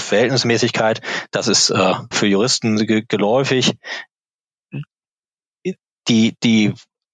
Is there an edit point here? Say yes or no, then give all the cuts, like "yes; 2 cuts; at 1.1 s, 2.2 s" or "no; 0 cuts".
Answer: yes; 1 cut; at 2.1 s